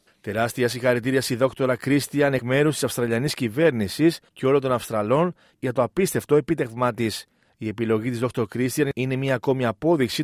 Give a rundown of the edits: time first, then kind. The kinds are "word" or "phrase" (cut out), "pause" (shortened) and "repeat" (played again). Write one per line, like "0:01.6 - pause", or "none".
0:07.5 - pause